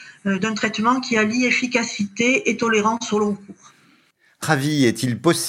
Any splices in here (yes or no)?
yes